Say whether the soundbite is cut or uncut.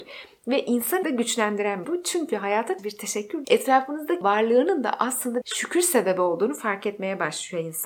cut